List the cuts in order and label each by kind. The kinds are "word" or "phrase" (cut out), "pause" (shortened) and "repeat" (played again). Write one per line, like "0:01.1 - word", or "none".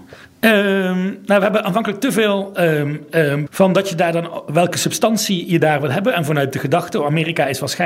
0:03.5 - word